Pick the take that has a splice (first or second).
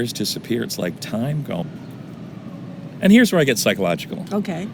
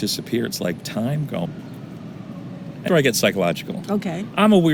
second